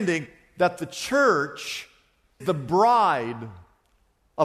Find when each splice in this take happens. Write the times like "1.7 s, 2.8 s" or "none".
2.4 s